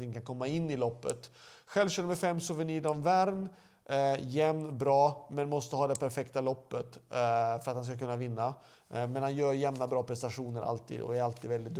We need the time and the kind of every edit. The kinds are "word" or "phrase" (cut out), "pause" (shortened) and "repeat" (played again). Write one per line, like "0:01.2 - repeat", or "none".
none